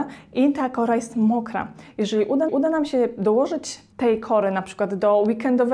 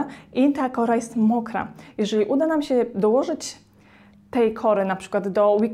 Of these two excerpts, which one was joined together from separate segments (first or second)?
first